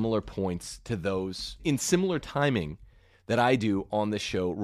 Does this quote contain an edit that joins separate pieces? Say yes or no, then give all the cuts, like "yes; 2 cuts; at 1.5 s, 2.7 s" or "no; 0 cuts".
yes; 1 cut; at 1.6 s